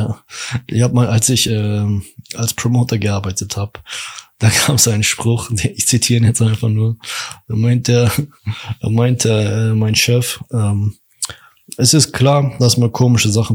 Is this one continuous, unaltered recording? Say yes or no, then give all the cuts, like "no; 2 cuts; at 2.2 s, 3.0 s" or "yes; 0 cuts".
yes; 0 cuts